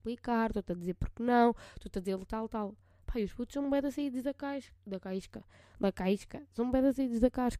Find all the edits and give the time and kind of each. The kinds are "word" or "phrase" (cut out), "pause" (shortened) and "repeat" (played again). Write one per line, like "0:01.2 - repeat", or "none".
none